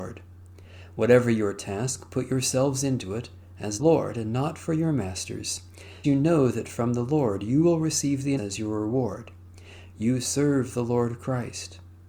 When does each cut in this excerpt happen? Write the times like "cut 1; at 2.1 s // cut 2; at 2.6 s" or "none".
cut 1; at 3.8 s // cut 2; at 6.0 s // cut 3; at 8.4 s

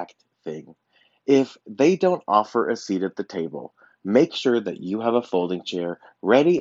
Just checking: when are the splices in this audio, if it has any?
none

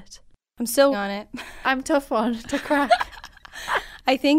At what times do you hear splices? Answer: cut 1; at 0.9 s // cut 2; at 1.6 s

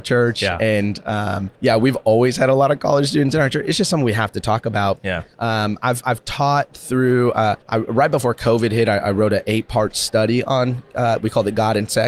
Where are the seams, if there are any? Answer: cut 1; at 1.5 s // cut 2; at 7.6 s

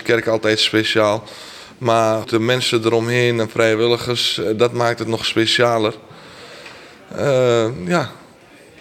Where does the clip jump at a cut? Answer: cut 1; at 2.2 s

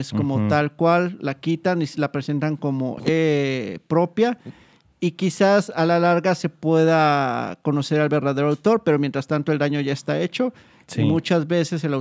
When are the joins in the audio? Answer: none

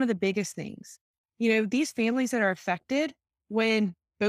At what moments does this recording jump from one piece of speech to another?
none

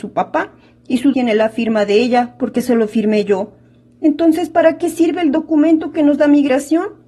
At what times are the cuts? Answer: cut 1; at 1.1 s

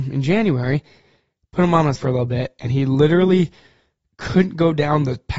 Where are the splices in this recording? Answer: cut 1; at 2.0 s

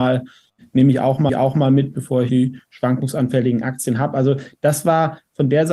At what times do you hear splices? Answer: cut 1; at 1.3 s // cut 2; at 2.3 s

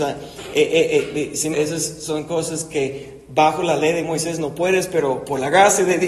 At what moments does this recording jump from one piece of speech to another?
cut 1; at 1.5 s

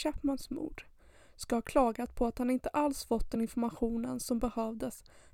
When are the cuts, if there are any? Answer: none

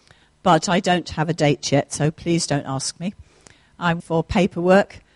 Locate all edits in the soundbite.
cut 1; at 4.0 s

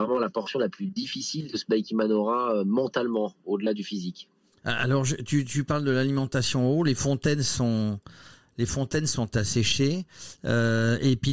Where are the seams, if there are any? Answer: none

